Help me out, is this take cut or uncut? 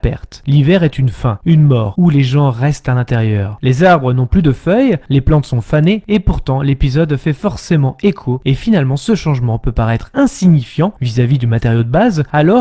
uncut